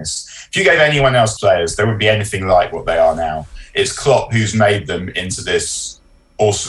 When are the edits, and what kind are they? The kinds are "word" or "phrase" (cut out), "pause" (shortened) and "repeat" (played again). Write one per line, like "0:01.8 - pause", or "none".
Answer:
0:01.4 - word